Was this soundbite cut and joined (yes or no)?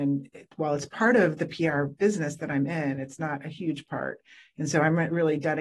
no